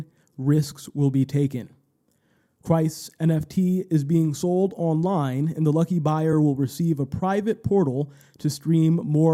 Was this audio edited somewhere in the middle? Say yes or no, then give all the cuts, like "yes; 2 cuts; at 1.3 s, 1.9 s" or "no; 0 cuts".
no; 0 cuts